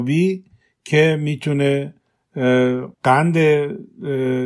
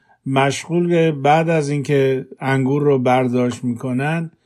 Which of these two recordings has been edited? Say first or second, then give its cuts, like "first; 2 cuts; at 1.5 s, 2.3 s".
first; 1 cut; at 2.9 s